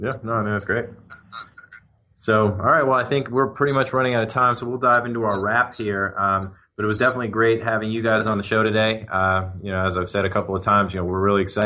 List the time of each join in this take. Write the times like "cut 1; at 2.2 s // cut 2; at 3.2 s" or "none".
none